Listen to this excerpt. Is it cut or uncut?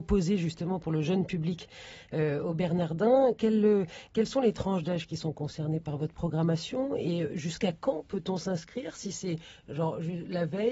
uncut